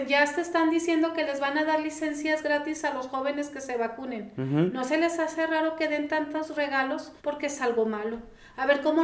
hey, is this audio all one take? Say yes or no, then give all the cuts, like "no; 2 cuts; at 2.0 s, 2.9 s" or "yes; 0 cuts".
no; 1 cut; at 7.2 s